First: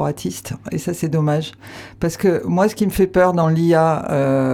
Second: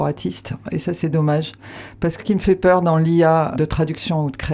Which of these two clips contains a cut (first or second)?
second